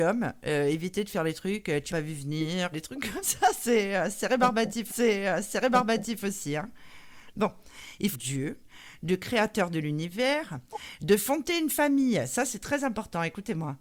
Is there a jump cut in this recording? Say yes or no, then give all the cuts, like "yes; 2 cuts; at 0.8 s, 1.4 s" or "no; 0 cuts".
yes; 5 cuts; at 1.9 s, 2.7 s, 3.2 s, 4.9 s, 8.1 s